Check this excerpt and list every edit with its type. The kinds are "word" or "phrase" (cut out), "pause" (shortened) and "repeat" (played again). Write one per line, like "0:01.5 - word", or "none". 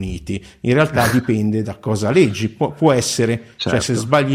none